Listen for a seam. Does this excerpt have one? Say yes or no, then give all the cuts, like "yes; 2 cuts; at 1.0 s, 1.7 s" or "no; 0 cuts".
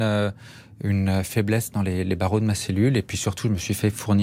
no; 0 cuts